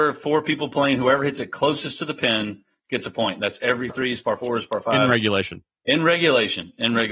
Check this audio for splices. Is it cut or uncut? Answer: cut